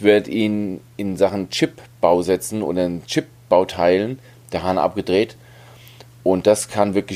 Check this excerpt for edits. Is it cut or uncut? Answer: uncut